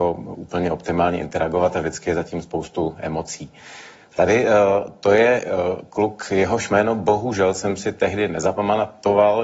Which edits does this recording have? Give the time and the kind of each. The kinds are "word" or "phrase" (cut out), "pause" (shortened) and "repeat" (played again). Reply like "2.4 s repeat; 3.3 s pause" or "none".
none